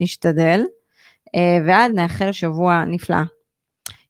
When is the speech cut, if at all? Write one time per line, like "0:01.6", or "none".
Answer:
0:01.9
0:02.3

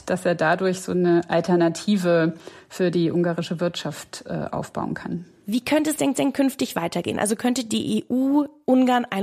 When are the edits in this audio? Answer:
0:06.1

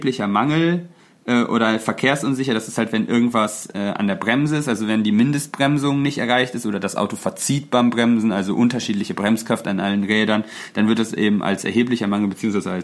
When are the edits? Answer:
none

